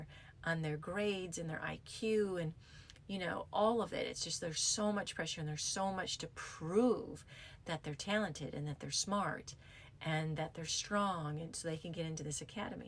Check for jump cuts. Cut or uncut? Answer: uncut